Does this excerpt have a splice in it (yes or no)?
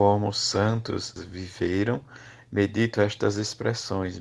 yes